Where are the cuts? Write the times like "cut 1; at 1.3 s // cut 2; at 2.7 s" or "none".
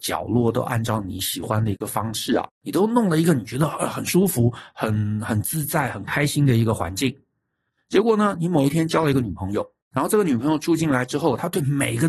cut 1; at 2.5 s // cut 2; at 9.8 s